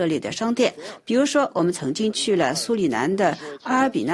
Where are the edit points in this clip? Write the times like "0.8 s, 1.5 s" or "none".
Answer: none